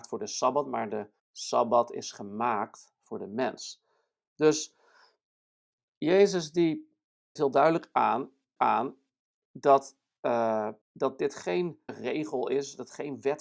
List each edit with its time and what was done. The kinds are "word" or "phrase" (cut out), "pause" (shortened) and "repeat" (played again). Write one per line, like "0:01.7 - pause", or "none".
0:01.2 - pause
0:07.4 - word
0:08.6 - repeat
0:10.8 - pause
0:11.9 - word